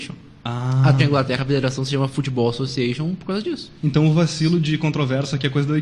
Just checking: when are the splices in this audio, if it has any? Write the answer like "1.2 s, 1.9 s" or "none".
1.0 s, 3.8 s